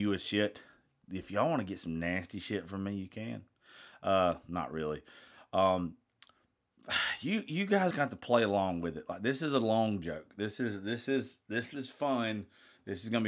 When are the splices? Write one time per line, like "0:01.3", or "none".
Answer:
0:07.9